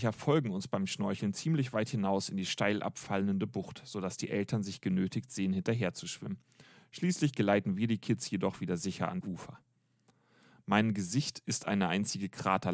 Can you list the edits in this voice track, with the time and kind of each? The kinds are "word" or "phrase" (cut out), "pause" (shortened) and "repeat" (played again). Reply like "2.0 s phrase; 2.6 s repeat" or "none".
9.2 s word